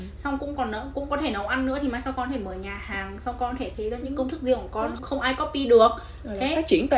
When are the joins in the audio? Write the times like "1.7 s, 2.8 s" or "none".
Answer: 3.7 s, 5.0 s

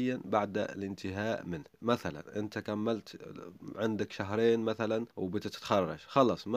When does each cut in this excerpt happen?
1.7 s, 5.1 s

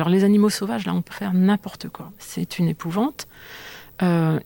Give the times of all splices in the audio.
1.1 s

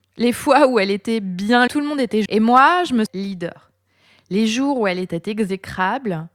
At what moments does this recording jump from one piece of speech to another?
1.7 s, 2.3 s, 3.1 s

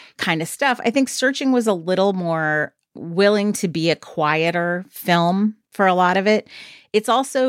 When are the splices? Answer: none

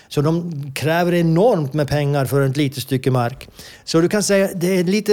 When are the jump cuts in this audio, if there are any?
none

